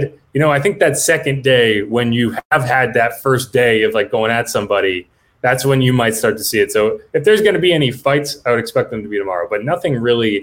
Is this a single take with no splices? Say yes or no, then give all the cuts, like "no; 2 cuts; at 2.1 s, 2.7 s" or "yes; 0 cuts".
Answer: yes; 0 cuts